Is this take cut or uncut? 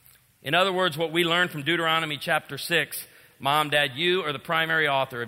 uncut